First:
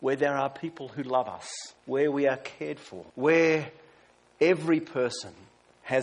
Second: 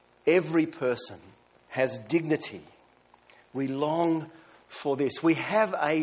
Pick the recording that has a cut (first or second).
first